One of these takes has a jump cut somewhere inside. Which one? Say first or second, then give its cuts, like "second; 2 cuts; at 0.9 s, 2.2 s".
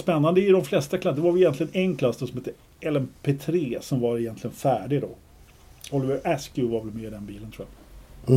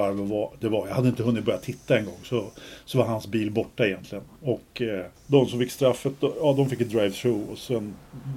second; 1 cut; at 5.2 s